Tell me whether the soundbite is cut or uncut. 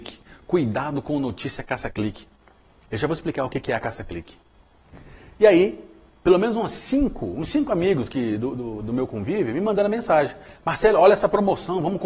uncut